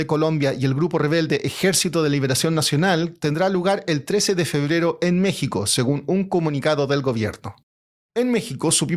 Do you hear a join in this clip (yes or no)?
no